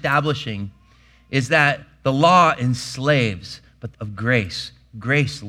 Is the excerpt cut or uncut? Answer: cut